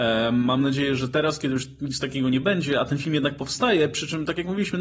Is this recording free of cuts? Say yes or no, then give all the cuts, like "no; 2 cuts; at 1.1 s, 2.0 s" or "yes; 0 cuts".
yes; 0 cuts